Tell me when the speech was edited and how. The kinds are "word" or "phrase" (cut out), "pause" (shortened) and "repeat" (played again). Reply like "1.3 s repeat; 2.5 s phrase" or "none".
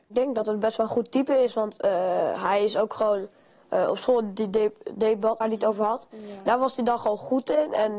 5.4 s phrase

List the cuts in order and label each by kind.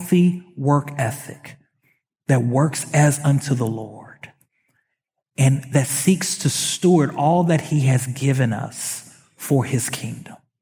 none

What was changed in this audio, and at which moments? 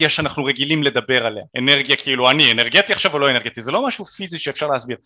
1.5 s pause

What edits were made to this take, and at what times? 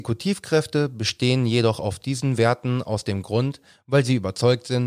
none

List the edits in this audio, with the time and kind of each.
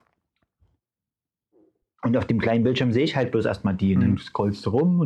none

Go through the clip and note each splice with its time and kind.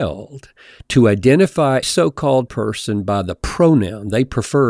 1.8 s word; 2.5 s word

